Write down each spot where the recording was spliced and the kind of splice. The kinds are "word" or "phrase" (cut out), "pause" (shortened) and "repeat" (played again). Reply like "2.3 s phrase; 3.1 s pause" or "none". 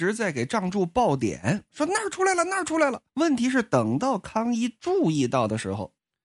3.1 s pause